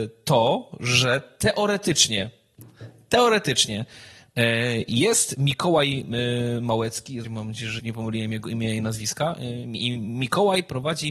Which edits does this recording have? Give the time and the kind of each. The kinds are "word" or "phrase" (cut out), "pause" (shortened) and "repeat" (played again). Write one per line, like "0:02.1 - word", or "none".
0:07.2 - word
0:07.8 - word

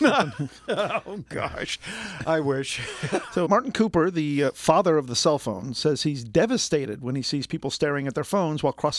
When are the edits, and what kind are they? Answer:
0:03.4 - word

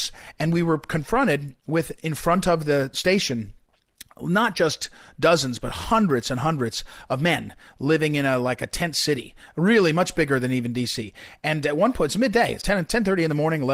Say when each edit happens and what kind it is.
0:12.6 - word

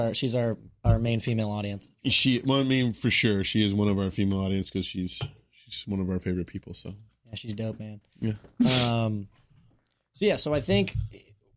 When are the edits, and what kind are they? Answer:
none

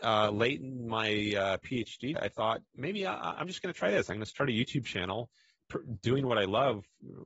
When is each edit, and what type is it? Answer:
0:02.1 - word
0:02.7 - pause

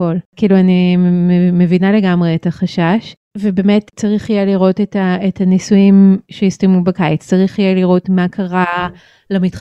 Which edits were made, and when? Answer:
0:06.2 - pause

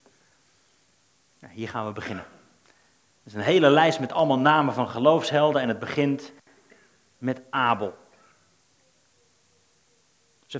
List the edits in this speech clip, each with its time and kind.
none

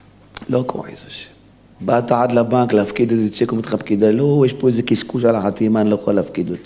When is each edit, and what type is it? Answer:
0:01.5 - pause

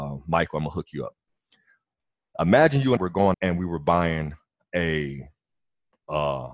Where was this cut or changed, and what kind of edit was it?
0:03.0 - word
0:03.3 - word

